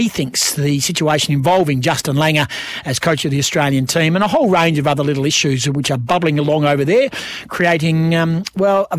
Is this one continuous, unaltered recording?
yes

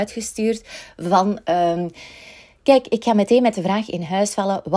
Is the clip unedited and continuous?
yes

